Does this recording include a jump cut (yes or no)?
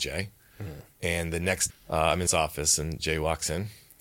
yes